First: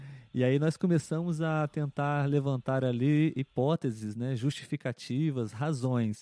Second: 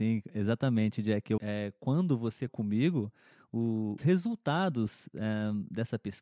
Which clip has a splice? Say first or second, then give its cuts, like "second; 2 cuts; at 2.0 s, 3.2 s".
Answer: second; 3 cuts; at 1.4 s, 2.5 s, 4.0 s